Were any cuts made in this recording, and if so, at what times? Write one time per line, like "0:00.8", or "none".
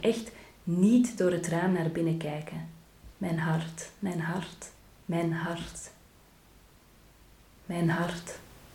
0:03.1
0:04.8

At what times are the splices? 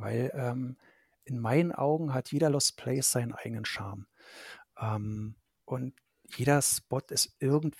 0:05.5

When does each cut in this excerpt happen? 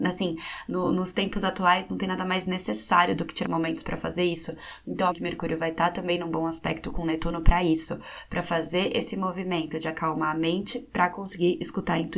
0:03.4
0:05.1

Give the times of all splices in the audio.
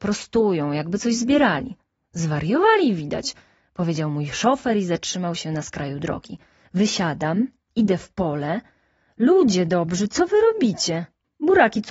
none

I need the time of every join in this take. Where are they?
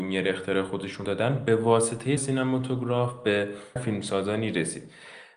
0:01.0
0:02.2
0:03.8

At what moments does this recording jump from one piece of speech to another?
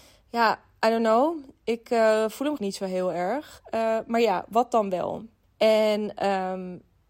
0:02.6
0:05.4

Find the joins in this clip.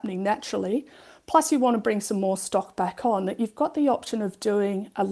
none

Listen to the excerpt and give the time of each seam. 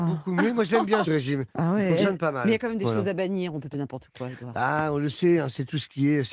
0:01.0
0:03.7

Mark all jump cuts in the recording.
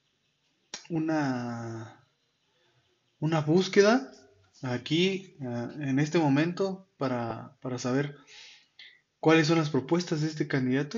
none

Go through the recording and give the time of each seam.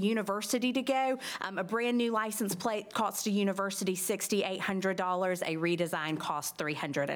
none

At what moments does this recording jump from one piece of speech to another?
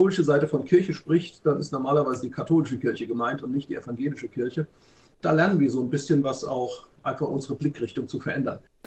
none

